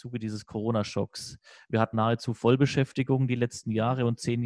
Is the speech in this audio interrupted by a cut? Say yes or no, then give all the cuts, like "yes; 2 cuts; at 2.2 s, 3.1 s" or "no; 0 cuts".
yes; 1 cut; at 1.9 s